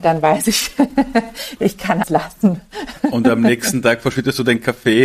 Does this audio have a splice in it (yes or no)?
yes